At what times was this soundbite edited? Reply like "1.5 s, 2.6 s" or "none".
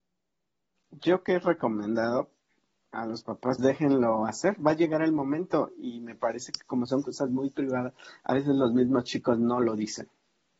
3.6 s

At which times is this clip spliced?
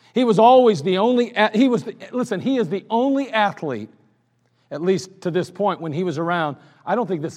none

